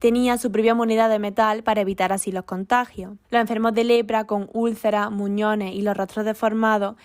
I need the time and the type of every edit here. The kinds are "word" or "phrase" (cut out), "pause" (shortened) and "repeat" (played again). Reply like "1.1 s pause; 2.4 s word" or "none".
3.2 s pause